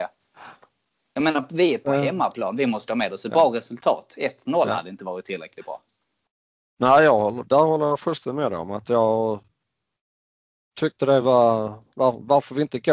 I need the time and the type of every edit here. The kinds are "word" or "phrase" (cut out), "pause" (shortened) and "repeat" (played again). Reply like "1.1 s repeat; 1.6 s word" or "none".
none